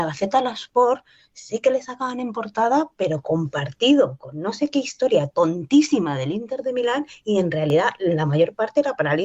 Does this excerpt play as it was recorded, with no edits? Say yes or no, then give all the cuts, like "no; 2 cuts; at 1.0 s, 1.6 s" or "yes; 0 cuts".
yes; 0 cuts